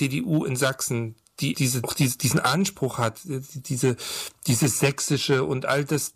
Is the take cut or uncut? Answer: cut